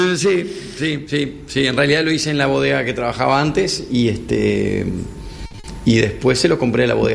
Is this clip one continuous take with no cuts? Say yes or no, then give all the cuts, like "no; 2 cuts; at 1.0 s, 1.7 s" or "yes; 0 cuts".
yes; 0 cuts